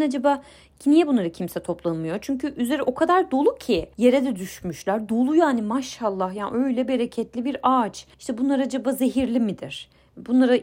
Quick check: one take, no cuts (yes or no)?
no